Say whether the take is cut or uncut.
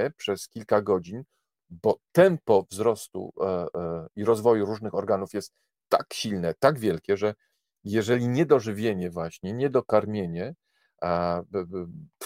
uncut